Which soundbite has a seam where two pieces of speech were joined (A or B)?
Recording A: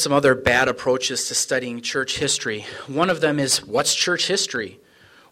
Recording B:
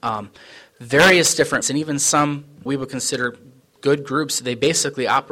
B